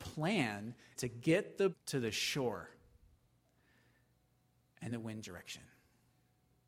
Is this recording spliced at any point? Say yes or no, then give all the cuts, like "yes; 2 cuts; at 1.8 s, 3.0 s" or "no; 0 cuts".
yes; 4 cuts; at 1.0 s, 1.7 s, 4.9 s, 5.2 s